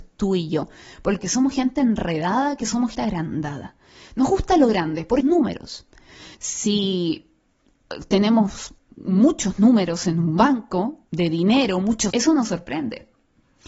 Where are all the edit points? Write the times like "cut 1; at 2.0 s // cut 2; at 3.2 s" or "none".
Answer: cut 1; at 1.2 s // cut 2; at 2.9 s // cut 3; at 5.2 s // cut 4; at 6.3 s // cut 5; at 11.1 s // cut 6; at 12.1 s